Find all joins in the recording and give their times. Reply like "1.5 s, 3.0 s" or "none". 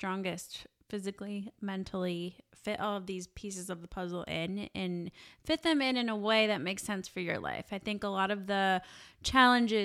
none